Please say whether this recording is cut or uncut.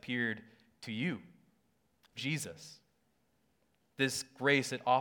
cut